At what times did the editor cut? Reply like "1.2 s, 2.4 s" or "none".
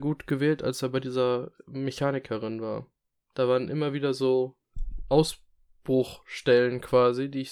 none